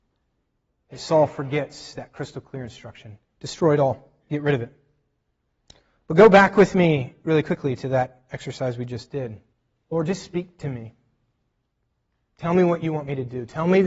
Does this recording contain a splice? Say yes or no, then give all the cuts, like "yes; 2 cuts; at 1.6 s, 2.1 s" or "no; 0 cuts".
yes; 3 cuts; at 4.2 s, 5.4 s, 9.5 s